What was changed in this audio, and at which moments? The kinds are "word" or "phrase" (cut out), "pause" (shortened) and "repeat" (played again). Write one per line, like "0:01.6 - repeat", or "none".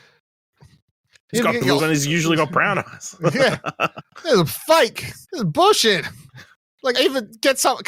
0:01.8 - word
0:05.2 - pause
0:06.9 - word